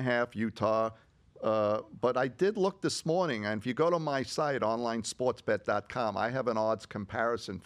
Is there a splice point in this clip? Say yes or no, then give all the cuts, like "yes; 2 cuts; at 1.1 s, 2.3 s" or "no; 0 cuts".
no; 0 cuts